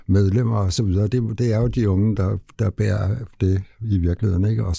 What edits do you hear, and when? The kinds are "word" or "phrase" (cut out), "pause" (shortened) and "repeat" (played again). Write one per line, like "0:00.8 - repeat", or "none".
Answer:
none